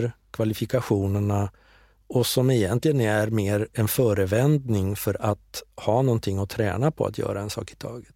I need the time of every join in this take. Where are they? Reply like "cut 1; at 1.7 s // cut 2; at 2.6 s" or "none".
none

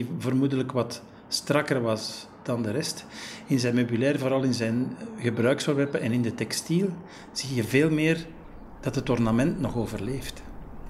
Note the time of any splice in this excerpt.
none

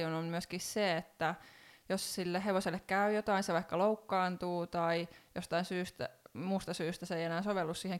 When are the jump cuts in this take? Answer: none

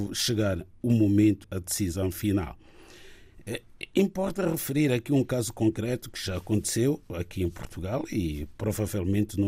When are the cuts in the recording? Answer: cut 1; at 1.4 s

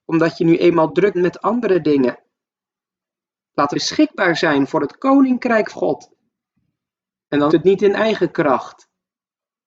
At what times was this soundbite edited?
cut 1; at 1.1 s // cut 2; at 3.7 s // cut 3; at 5.7 s // cut 4; at 7.5 s

